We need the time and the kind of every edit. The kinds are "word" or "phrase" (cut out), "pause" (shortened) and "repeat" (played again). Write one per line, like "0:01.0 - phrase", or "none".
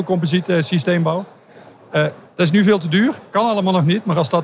none